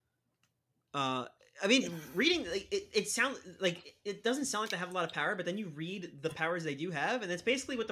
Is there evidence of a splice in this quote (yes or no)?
no